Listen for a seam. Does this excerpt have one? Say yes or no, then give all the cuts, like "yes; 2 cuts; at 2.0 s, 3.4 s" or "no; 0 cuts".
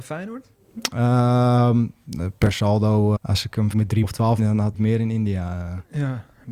yes; 5 cuts; at 3.2 s, 3.7 s, 4.0 s, 4.4 s, 4.7 s